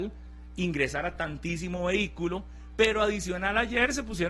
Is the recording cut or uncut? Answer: uncut